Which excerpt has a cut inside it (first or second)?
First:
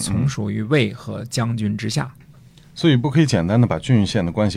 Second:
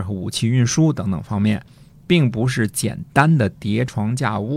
first